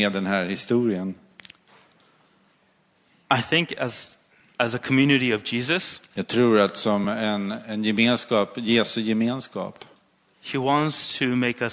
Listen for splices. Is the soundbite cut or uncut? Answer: uncut